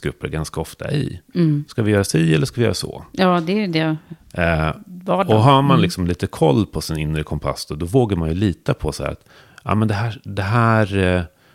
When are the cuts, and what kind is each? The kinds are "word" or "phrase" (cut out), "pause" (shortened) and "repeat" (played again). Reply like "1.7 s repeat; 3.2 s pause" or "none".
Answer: none